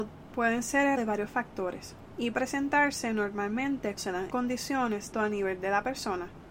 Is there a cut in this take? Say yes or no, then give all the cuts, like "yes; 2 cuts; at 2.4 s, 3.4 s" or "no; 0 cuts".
yes; 5 cuts; at 1.0 s, 2.3 s, 4.0 s, 4.3 s, 5.1 s